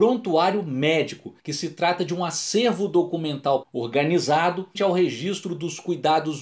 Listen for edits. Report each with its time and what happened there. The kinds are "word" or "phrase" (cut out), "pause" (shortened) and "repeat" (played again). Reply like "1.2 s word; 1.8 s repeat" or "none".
1.4 s pause; 3.6 s word; 4.7 s word